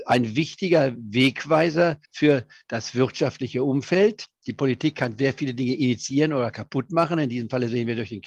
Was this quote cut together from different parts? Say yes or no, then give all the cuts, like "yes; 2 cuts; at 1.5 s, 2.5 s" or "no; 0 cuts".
yes; 2 cuts; at 2.0 s, 4.3 s